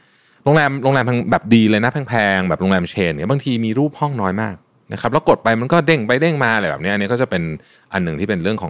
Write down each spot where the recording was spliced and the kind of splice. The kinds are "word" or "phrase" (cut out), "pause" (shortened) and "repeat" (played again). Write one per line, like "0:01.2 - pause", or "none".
0:04.7 - pause